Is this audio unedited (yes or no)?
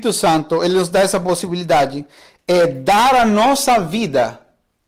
yes